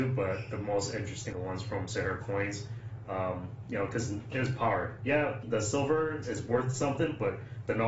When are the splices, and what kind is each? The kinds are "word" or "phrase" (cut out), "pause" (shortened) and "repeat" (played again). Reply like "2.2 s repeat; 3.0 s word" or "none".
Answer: 1.3 s phrase; 4.3 s word; 5.4 s word; 6.2 s word